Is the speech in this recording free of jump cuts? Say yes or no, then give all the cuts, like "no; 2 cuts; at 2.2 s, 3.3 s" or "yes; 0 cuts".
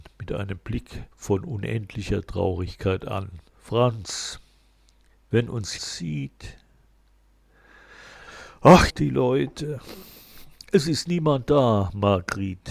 no; 4 cuts; at 1.1 s, 3.5 s, 5.8 s, 8.9 s